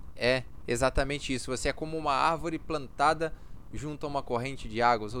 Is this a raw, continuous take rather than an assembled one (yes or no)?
yes